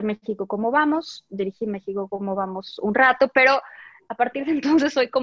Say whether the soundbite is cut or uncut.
uncut